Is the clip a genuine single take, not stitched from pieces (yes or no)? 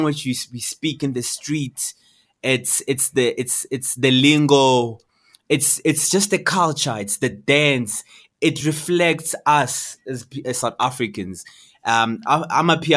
yes